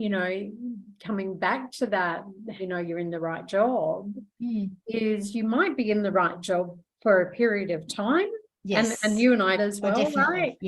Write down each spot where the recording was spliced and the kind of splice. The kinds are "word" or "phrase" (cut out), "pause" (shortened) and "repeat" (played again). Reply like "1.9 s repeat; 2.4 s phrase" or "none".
2.6 s phrase; 8.6 s pause; 9.5 s phrase